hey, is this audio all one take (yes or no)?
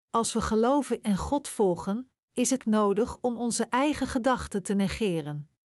no